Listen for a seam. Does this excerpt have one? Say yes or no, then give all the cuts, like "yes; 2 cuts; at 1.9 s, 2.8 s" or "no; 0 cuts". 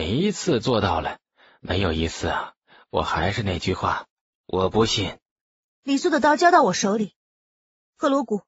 no; 0 cuts